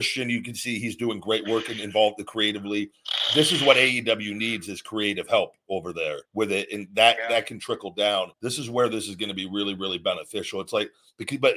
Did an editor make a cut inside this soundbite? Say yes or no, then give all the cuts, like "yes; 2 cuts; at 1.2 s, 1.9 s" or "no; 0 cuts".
yes; 2 cuts; at 6.3 s, 8.3 s